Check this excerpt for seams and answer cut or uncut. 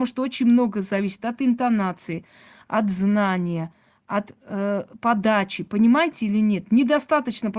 uncut